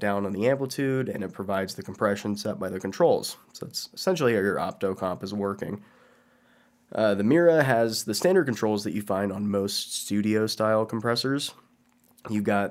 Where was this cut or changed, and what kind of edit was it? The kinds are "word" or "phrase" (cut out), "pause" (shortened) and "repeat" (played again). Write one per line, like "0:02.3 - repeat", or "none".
none